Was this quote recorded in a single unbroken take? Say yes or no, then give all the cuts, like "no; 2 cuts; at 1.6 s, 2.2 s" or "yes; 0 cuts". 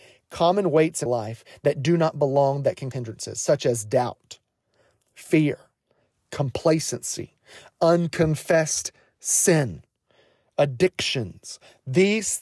no; 2 cuts; at 1.1 s, 2.9 s